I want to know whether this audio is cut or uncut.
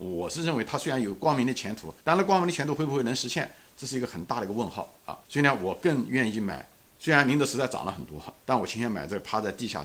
cut